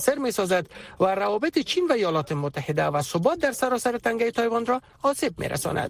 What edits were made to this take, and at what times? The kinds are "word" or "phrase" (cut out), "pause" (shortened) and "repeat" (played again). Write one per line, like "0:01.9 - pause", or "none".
none